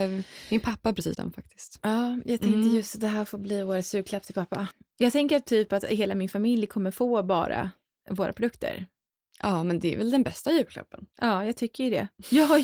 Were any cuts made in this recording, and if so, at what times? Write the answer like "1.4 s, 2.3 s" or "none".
1.1 s, 11.1 s